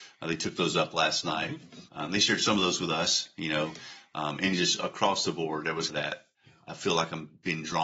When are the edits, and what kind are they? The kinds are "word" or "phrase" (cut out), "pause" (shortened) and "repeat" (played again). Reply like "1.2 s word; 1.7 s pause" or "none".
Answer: 1.9 s pause; 5.9 s word; 6.3 s pause